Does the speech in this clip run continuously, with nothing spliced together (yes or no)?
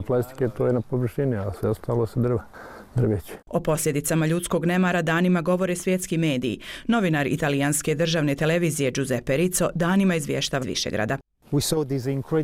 no